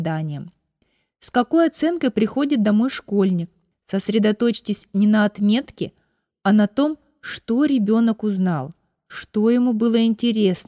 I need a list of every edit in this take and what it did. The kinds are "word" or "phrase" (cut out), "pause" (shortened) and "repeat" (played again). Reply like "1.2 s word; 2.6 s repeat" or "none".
3.7 s pause